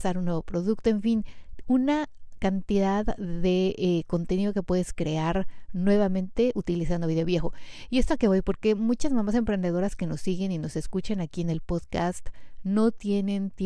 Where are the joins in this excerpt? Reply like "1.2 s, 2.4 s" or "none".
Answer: none

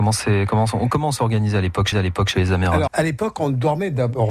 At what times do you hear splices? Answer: 1.9 s, 2.9 s

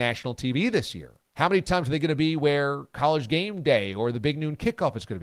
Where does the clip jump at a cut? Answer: 1.3 s

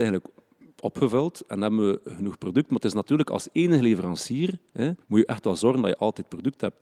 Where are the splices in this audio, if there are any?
5.0 s

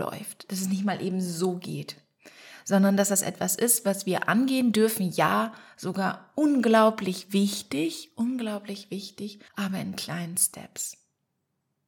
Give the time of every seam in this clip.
9.5 s

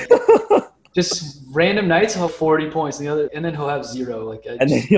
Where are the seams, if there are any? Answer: 2.3 s, 3.3 s

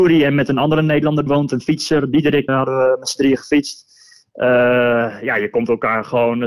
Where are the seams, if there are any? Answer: 1.3 s, 2.5 s

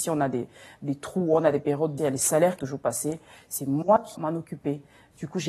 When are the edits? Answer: 2.0 s, 2.6 s, 4.1 s

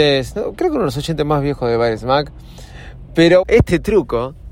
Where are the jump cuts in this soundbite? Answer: 3.4 s

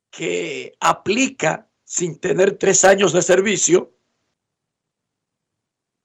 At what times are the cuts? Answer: none

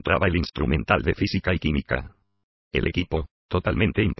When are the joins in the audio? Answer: none

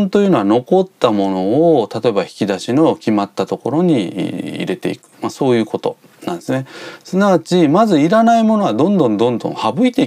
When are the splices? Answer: 5.1 s

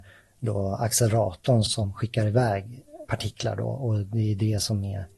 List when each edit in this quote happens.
1.7 s

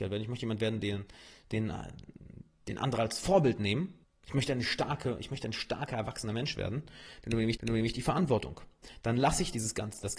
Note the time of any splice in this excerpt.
4.0 s, 7.6 s

